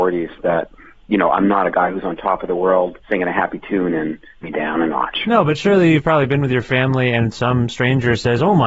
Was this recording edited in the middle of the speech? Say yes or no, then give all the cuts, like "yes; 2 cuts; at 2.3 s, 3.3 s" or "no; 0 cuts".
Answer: yes; 2 cuts; at 3.0 s, 4.4 s